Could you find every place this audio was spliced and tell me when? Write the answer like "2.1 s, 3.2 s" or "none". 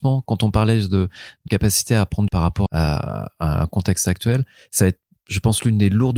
1.5 s, 2.3 s, 2.7 s